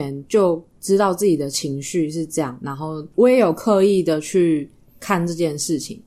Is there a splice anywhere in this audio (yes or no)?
no